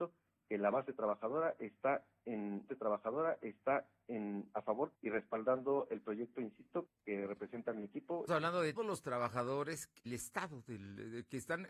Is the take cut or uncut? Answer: cut